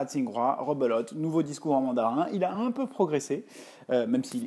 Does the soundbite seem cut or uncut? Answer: uncut